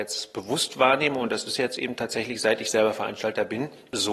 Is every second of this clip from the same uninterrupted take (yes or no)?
yes